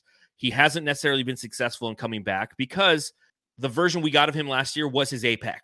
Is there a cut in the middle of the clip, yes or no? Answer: yes